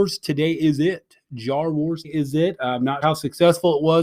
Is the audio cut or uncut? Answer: cut